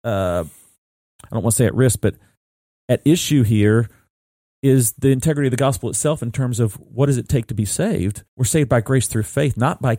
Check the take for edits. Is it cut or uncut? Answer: cut